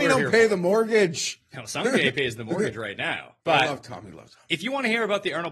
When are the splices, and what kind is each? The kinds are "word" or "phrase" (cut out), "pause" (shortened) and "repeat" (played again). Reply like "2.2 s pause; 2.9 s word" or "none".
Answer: 3.4 s pause